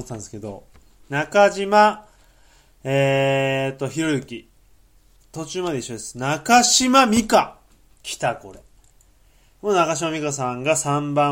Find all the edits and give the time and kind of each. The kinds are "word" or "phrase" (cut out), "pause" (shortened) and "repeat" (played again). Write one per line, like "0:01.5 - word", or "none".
none